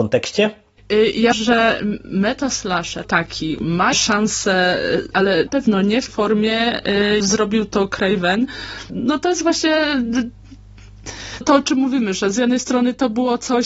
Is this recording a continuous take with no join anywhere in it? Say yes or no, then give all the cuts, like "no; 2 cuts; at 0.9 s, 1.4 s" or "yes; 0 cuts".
no; 9 cuts; at 1.3 s, 3.0 s, 3.9 s, 5.1 s, 5.5 s, 6.1 s, 7.2 s, 8.9 s, 11.4 s